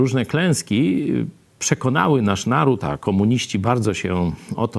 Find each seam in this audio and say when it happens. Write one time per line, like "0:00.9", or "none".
none

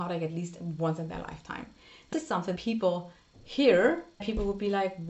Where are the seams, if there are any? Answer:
0:02.1
0:02.6
0:04.2

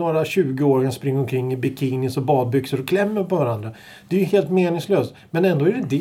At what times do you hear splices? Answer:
none

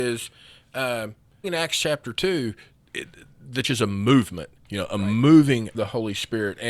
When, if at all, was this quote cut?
0:01.4
0:03.6
0:05.7

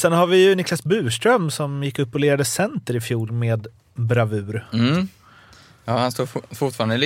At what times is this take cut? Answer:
none

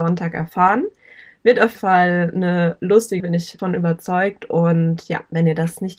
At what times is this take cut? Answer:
0:01.7
0:03.2
0:03.6

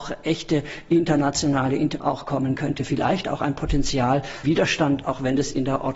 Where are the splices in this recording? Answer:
0:02.0
0:04.4

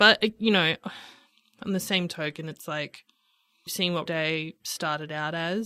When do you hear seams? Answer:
0:03.7
0:04.1

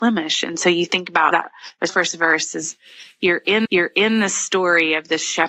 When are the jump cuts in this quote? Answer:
0:01.3
0:01.9
0:03.6

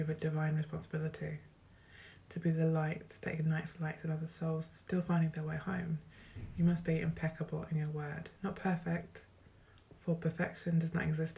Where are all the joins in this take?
0:08.4

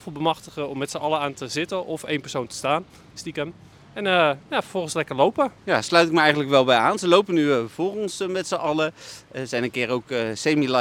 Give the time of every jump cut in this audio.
0:03.7
0:05.6

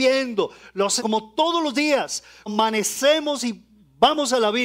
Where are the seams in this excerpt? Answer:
0:01.0
0:02.5

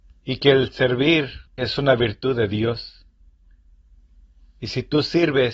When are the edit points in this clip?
0:01.5

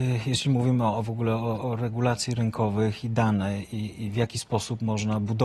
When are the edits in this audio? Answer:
none

